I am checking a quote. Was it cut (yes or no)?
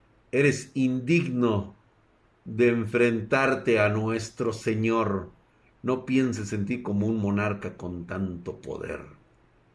no